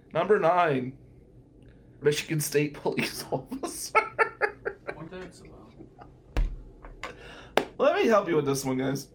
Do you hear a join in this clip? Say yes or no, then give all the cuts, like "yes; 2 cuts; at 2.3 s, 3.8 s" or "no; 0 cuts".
yes; 3 cuts; at 2.0 s, 5.1 s, 7.8 s